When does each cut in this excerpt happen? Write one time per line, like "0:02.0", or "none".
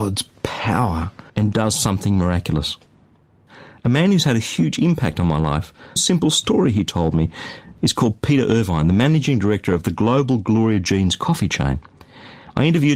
0:01.3
0:06.0